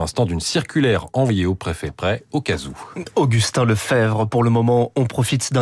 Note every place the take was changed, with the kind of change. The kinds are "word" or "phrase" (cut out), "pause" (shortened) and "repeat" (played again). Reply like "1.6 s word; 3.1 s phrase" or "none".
1.9 s phrase